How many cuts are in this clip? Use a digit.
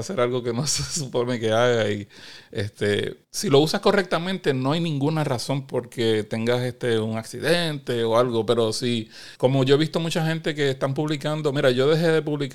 2